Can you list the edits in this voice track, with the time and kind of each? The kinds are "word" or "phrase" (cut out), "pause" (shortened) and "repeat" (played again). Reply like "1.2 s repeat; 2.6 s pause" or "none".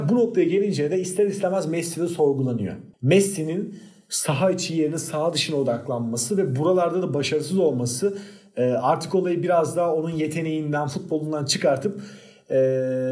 none